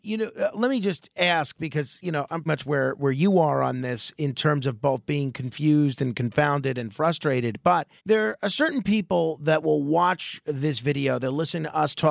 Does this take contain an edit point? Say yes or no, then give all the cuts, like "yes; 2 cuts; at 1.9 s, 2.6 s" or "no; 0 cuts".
yes; 2 cuts; at 2.5 s, 8.0 s